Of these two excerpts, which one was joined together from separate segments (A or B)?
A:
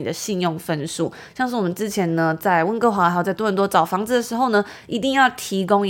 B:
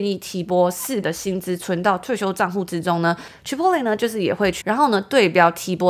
B